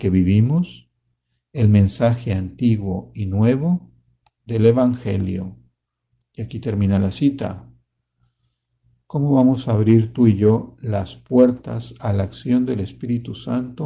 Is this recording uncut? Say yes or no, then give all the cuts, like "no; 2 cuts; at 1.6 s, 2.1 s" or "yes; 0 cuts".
yes; 0 cuts